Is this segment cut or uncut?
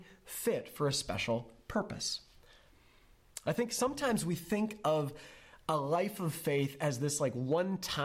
uncut